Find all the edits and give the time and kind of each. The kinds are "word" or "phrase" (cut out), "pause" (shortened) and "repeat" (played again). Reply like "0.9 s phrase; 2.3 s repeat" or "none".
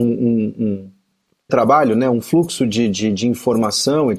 1.5 s phrase